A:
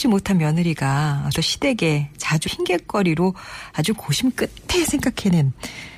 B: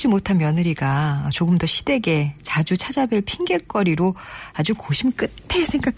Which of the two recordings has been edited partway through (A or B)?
A